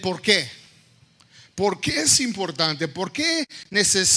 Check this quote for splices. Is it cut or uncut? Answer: uncut